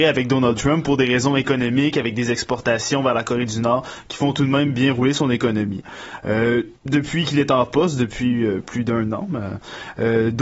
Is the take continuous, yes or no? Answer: no